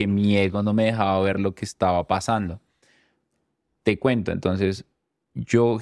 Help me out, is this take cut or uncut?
uncut